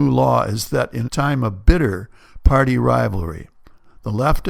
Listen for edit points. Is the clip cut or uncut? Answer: cut